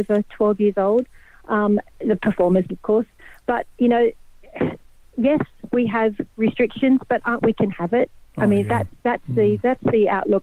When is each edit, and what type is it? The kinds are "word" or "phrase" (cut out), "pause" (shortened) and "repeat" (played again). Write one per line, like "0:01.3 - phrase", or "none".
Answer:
0:01.9 - pause
0:02.7 - word
0:07.4 - phrase